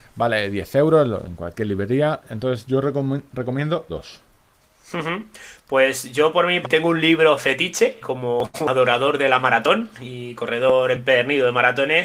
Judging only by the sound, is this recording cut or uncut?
cut